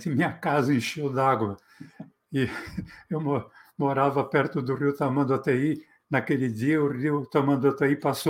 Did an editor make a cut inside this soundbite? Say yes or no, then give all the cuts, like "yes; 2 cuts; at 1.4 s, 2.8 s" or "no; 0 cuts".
no; 0 cuts